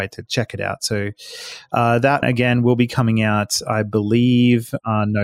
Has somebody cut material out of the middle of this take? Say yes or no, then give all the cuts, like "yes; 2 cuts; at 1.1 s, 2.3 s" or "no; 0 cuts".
yes; 1 cut; at 2.2 s